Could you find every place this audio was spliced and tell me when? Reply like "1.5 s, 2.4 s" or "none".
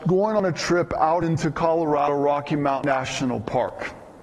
none